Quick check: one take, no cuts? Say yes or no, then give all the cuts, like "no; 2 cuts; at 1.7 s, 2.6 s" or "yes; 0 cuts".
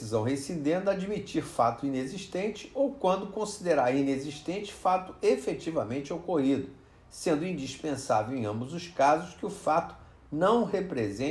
yes; 0 cuts